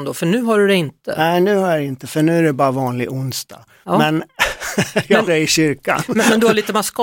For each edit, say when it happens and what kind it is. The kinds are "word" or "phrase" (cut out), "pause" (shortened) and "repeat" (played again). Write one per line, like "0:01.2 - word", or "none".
0:05.3 - word